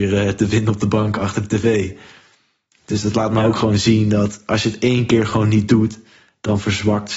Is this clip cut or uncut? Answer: uncut